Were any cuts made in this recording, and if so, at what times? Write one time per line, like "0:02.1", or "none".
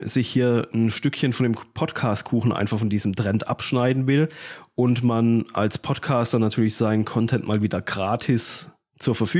none